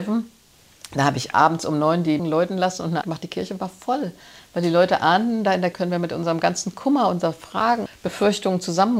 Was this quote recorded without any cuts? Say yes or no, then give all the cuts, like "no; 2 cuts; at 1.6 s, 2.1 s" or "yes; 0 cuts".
no; 5 cuts; at 1.3 s, 2.2 s, 3.0 s, 5.7 s, 7.9 s